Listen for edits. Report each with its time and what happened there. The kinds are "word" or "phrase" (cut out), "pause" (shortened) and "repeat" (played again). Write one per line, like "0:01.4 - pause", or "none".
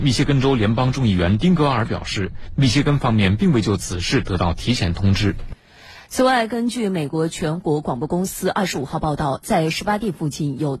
none